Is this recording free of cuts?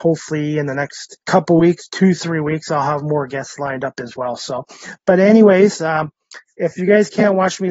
no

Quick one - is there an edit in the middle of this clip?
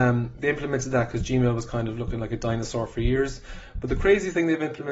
no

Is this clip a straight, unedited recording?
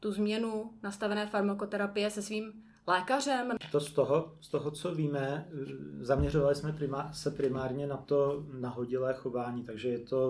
yes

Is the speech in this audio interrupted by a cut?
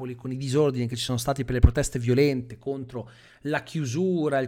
no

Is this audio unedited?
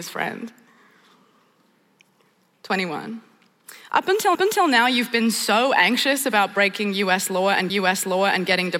no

